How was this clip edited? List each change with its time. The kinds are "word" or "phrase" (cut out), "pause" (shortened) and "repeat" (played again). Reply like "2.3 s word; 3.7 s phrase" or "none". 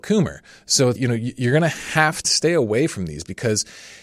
1.0 s word; 2.2 s phrase